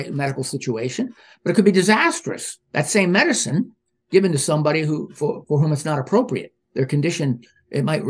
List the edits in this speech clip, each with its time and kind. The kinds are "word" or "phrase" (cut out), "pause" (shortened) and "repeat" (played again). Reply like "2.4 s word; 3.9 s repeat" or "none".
none